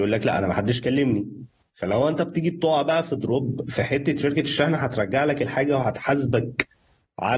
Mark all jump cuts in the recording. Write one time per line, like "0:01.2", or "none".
0:04.2